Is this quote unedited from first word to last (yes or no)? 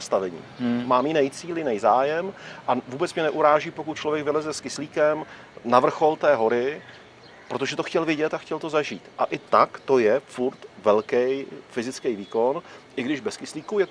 yes